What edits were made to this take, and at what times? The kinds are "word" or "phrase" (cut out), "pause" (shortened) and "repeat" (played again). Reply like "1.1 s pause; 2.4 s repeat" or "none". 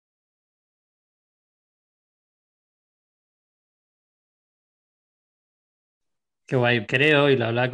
6.8 s word